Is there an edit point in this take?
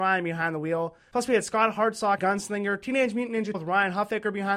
yes; 2 cuts; at 2.2 s, 3.5 s

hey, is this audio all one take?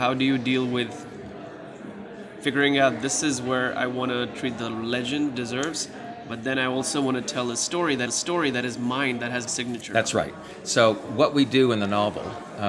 no; 3 cuts; at 5.3 s, 8.1 s, 9.5 s

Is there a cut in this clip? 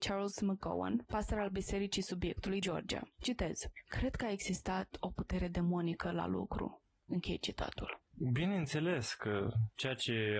yes; 1 cut; at 2.6 s

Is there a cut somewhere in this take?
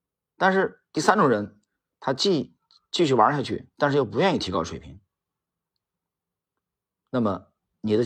yes; 1 cut; at 3.7 s

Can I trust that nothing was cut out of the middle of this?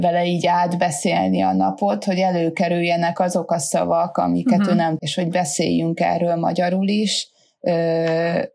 no; 1 cut; at 5.0 s

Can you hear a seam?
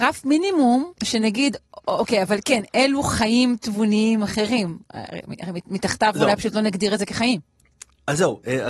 yes; 1 cut; at 1.0 s

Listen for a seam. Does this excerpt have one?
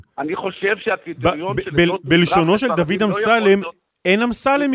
no; 0 cuts

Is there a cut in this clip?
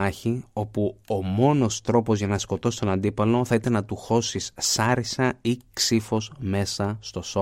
no; 0 cuts

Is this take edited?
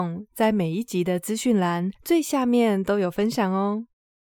yes; 1 cut; at 2.0 s

